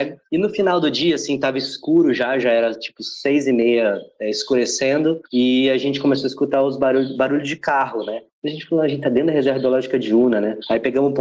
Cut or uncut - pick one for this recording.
uncut